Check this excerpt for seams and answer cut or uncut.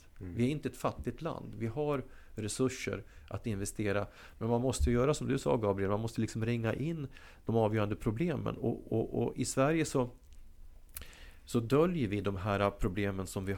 uncut